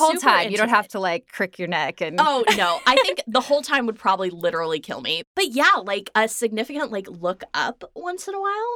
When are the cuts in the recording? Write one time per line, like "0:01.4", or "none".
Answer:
none